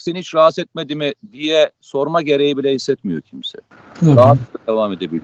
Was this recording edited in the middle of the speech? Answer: no; 0 cuts

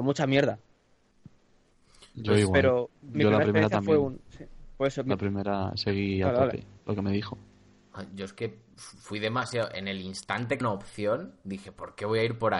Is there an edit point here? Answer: yes; 1 cut; at 10.6 s

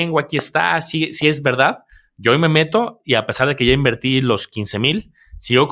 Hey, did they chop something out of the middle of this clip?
no; 0 cuts

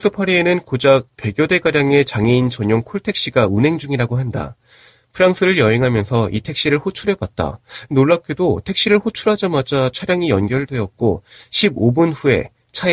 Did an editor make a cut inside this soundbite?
no; 0 cuts

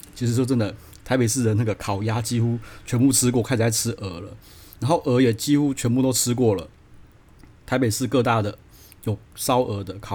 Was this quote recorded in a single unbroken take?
yes; 0 cuts

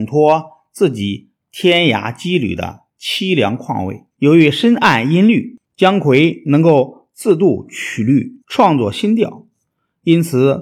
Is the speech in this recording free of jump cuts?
no; 4 cuts; at 2.9 s, 4.1 s, 5.6 s, 8.4 s

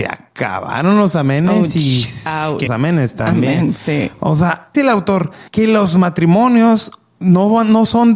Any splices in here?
yes; 3 cuts; at 2.7 s, 4.7 s, 5.5 s

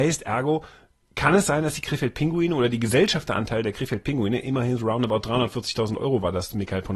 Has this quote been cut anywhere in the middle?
no; 0 cuts

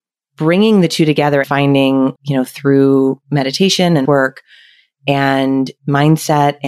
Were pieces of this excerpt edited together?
yes; 4 cuts; at 1.4 s, 2.2 s, 3.2 s, 4.1 s

